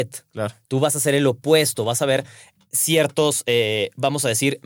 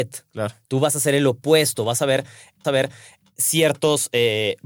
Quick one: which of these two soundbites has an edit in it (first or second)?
second